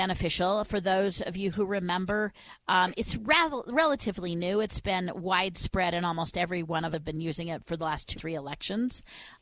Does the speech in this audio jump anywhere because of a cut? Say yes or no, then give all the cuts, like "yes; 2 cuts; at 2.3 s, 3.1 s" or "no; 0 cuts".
yes; 2 cuts; at 6.9 s, 8.1 s